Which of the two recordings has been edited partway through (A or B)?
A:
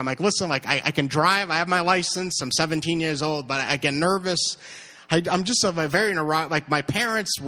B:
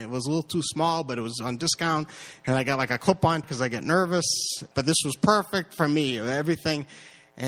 B